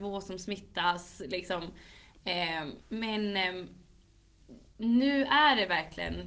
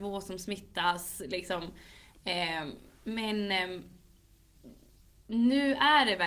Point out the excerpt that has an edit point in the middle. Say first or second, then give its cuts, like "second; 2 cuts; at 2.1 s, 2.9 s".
first; 2 cuts; at 2.8 s, 4.7 s